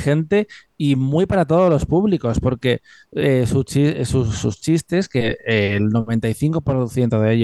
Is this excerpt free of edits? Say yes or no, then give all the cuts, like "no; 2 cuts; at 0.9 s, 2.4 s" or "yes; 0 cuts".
yes; 0 cuts